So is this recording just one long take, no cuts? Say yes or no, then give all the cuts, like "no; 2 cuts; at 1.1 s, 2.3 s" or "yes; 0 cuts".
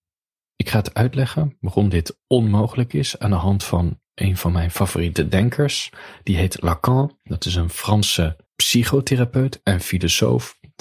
no; 1 cut; at 8.5 s